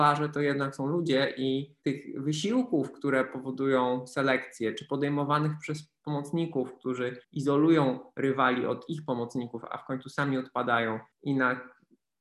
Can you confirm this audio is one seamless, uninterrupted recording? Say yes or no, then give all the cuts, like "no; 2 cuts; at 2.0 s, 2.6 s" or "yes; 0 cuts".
no; 3 cuts; at 1.8 s, 7.2 s, 11.1 s